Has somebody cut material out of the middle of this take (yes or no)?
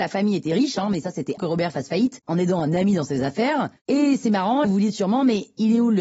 yes